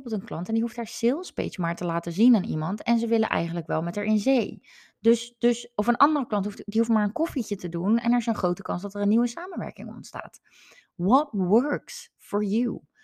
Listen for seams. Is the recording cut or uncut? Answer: uncut